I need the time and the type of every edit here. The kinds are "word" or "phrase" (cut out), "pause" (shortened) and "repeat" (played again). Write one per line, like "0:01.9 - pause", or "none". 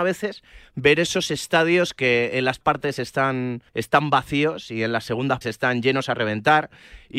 0:02.6 - word
0:03.7 - pause
0:05.4 - word